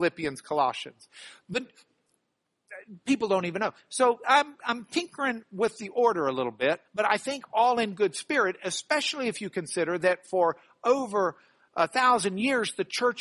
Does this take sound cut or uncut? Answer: cut